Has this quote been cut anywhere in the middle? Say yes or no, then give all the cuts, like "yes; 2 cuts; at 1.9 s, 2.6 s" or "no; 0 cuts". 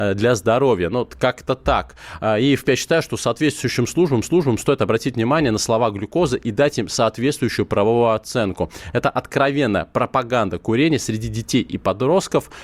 yes; 3 cuts; at 1.1 s, 2.6 s, 4.2 s